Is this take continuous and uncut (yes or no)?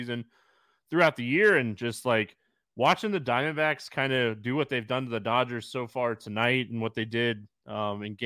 yes